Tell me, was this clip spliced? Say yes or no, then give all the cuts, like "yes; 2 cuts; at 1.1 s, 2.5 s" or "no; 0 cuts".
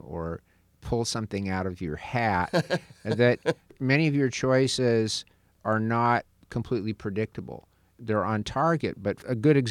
no; 0 cuts